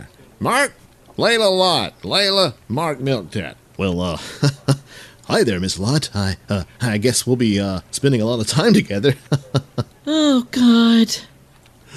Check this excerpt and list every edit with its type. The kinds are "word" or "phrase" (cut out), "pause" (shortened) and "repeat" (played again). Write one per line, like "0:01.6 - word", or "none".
none